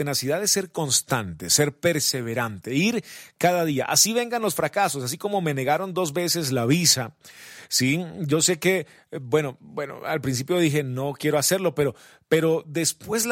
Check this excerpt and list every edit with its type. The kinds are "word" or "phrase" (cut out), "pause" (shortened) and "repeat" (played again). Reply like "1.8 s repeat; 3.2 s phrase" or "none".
none